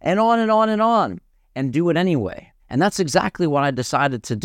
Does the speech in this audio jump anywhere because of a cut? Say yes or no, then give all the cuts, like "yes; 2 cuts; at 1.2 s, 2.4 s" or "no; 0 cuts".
yes; 2 cuts; at 1.3 s, 2.6 s